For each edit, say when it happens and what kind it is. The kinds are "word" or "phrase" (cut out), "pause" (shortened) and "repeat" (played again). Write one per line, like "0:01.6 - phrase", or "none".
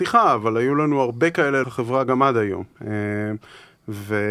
0:01.6 - word